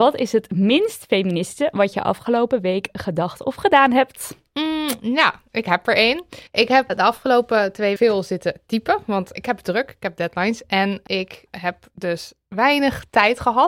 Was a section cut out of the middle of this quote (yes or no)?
yes